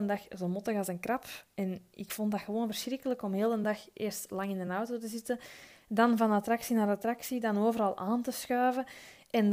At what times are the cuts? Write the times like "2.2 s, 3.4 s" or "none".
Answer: none